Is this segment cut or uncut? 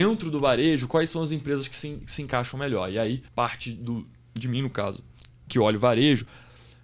cut